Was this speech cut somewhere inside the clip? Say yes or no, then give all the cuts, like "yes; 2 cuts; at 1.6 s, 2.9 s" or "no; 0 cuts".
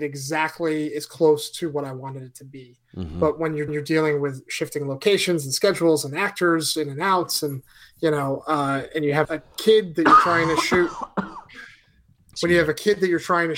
yes; 2 cuts; at 3.7 s, 9.2 s